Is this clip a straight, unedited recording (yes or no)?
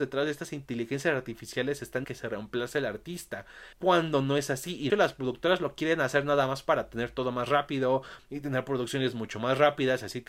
no